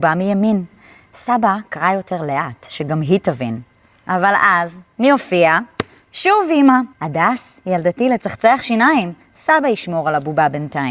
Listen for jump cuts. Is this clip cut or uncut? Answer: cut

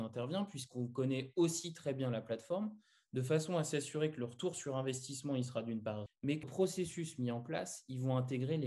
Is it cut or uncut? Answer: cut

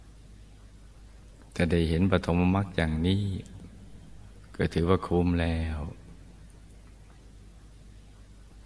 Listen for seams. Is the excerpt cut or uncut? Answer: uncut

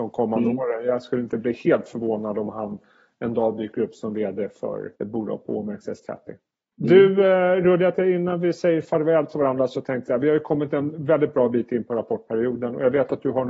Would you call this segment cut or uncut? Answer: cut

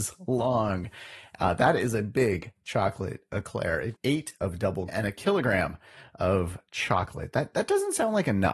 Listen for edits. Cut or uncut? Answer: cut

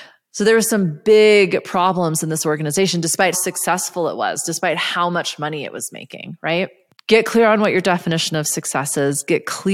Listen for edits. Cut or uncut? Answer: cut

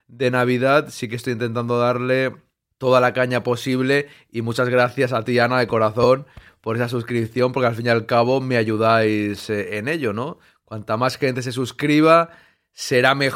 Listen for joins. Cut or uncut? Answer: uncut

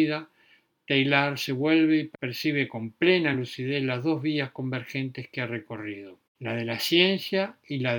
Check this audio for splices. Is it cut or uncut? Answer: uncut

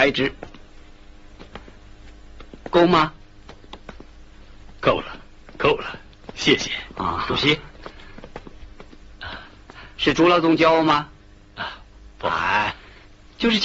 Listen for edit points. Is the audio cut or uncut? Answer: uncut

